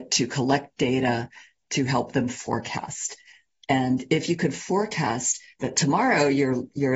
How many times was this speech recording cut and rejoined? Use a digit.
0